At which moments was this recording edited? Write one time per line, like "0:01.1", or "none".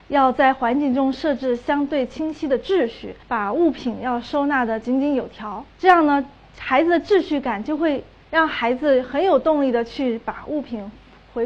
0:03.2
0:05.7